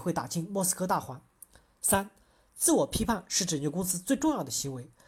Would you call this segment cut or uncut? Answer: uncut